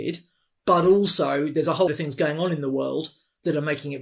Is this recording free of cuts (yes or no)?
no